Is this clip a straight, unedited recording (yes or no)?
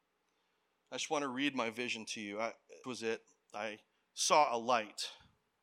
no